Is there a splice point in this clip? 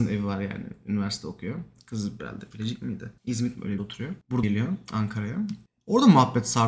yes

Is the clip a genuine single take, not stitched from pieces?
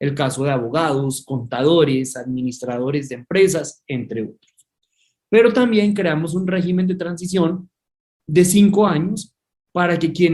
yes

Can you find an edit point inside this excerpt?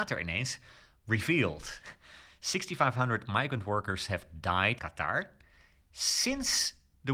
yes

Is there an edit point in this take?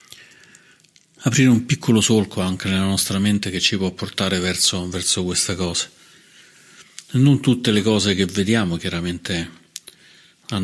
no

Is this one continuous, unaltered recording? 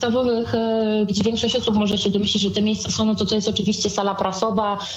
yes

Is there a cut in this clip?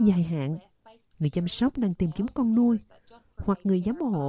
no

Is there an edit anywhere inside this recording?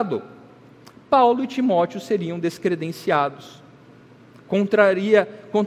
no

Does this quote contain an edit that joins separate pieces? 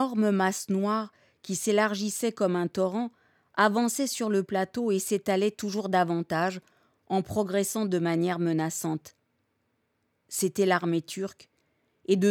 no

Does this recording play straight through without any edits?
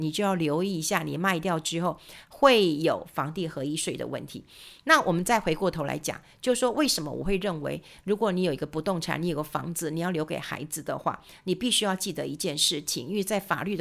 yes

